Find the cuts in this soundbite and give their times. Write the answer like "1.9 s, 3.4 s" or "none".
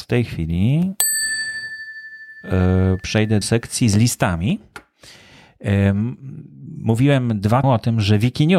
3.4 s, 7.6 s